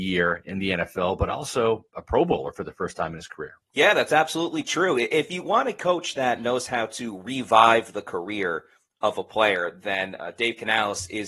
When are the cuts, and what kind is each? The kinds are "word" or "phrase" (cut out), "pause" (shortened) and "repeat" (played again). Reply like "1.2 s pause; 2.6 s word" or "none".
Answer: 3.6 s pause